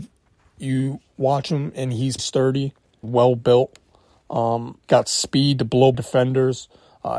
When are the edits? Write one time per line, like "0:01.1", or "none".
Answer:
0:02.2
0:03.0
0:04.8
0:05.9

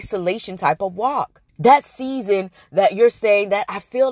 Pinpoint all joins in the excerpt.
0:01.5

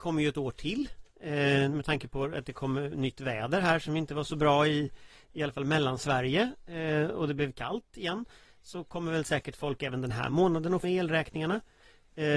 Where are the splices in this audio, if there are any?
0:10.8

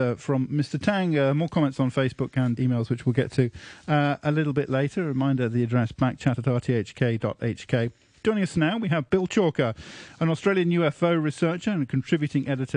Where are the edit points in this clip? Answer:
0:02.6

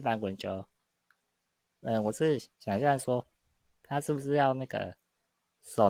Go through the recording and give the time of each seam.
0:02.5

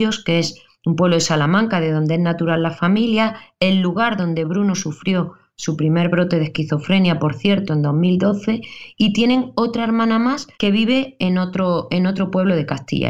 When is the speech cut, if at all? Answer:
0:10.5

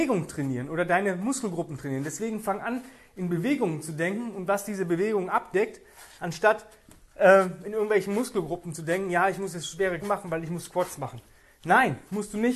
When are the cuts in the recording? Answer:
0:10.0

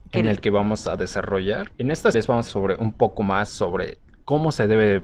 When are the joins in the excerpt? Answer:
0:01.7
0:02.1
0:02.5

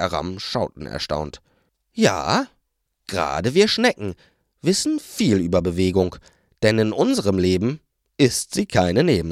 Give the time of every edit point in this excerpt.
none

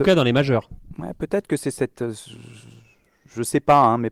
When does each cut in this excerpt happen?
none

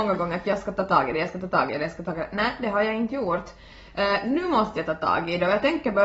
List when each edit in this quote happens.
none

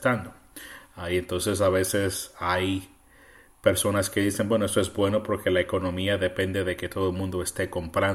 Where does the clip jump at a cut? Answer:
none

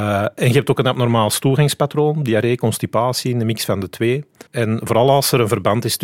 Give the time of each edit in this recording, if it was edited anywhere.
0:04.5

